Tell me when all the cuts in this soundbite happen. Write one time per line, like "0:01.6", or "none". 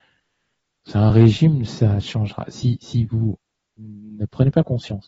none

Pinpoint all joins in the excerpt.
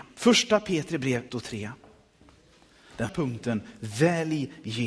0:01.3
0:03.1

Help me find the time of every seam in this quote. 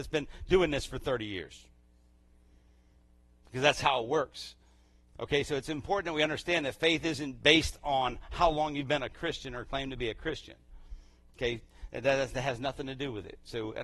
none

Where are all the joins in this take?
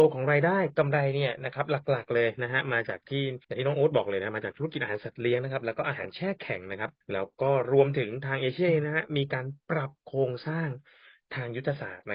0:03.4
0:07.0

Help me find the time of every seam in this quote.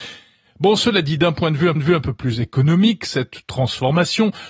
0:01.8

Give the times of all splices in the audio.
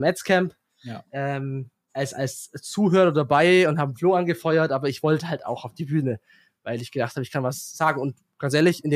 none

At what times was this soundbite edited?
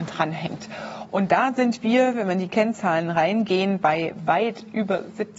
none

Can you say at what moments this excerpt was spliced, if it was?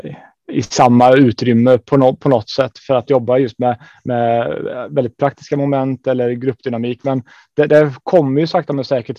none

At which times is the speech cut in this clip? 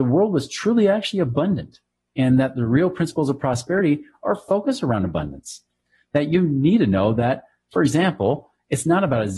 none

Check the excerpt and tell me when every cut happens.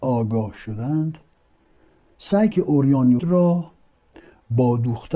0:02.5
0:03.2

